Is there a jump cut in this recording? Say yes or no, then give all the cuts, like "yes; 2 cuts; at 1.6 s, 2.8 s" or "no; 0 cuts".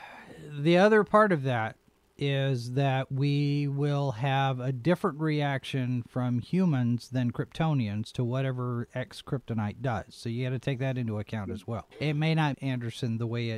yes; 2 cuts; at 11.9 s, 12.5 s